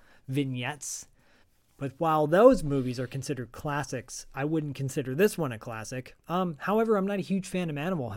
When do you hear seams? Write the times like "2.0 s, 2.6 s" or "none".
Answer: 1.4 s, 6.2 s